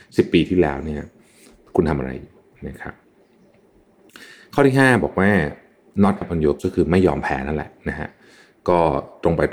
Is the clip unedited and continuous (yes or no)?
no